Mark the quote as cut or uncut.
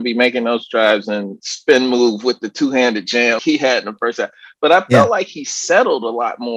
cut